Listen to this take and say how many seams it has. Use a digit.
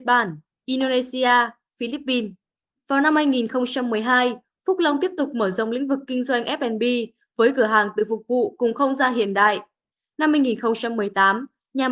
0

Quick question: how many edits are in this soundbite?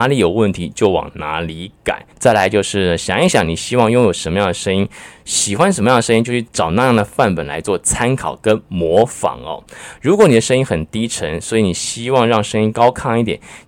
1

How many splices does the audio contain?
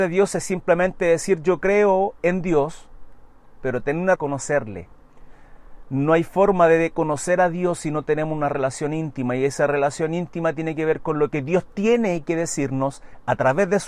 1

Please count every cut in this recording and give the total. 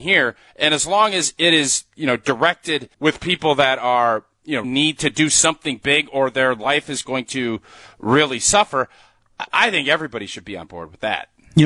2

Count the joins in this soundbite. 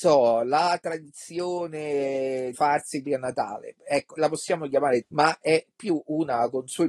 4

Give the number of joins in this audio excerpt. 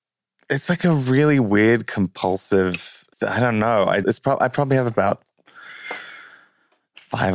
2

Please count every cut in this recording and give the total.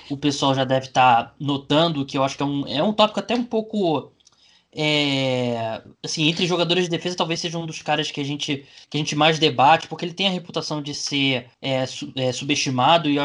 3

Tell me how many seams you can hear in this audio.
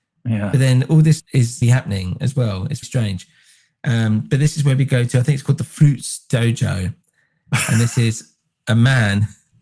3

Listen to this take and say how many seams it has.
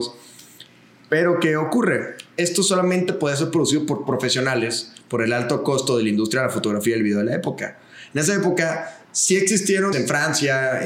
2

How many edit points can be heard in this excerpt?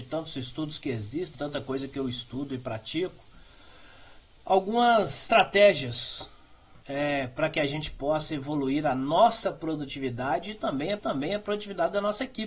3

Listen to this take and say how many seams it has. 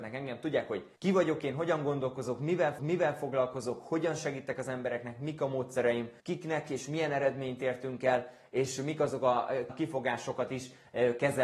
4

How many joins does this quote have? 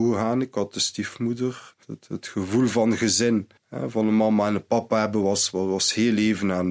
2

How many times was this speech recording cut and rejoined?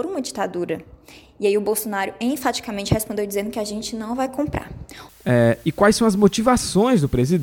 0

